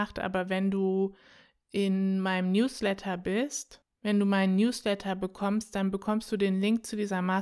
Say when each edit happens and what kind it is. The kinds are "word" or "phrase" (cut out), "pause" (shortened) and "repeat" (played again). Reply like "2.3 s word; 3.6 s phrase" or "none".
none